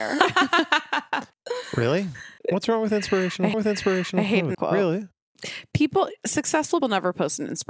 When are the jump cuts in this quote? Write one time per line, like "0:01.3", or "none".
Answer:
0:01.3
0:02.4
0:03.5
0:04.5
0:06.8